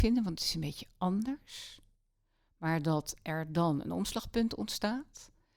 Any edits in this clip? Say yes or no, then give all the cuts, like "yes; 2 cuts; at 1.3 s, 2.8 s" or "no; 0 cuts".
no; 0 cuts